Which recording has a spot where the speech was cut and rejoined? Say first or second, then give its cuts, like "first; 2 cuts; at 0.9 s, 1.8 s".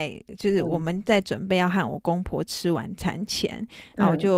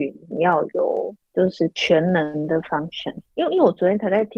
second; 1 cut; at 3.3 s